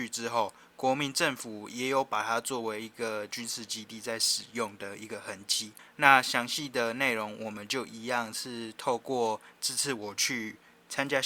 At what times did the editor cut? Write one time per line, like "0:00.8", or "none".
0:05.8